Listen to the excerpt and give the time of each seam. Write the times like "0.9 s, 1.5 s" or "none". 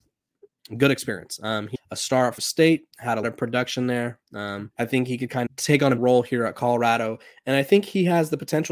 1.7 s, 2.4 s, 3.2 s, 4.7 s, 5.5 s, 6.0 s